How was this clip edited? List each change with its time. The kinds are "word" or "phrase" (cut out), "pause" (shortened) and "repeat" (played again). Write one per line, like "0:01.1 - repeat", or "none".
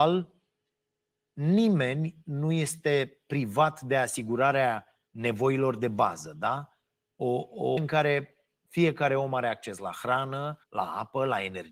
0:05.1 - pause
0:07.8 - phrase
0:10.6 - pause